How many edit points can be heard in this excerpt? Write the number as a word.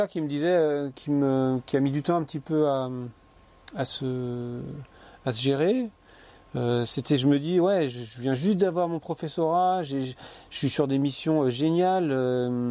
one